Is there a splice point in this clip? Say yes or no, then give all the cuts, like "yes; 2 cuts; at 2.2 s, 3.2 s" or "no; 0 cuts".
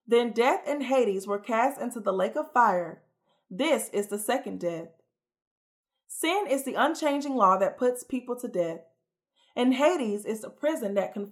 no; 0 cuts